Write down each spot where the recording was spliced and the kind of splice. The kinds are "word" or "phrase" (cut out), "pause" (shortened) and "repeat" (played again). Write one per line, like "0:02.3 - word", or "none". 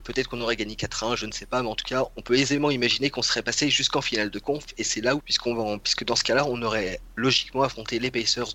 0:05.2 - phrase